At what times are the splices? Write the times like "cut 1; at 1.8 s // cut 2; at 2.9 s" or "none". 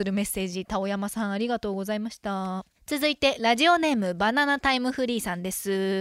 cut 1; at 2.7 s